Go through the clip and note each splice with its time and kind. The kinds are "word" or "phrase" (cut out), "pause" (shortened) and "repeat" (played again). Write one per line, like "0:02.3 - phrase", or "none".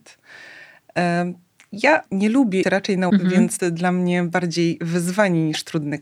0:02.1 - word
0:02.6 - word
0:03.1 - word
0:03.6 - phrase